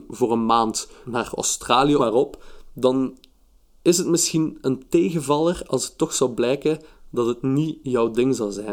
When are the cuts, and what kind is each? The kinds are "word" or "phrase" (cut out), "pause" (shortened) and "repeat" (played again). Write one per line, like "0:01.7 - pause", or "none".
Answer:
0:01.0 - word
0:02.0 - phrase